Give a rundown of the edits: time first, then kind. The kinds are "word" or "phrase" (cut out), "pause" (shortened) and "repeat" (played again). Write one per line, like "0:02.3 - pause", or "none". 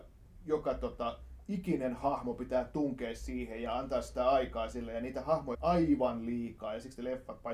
0:05.5 - word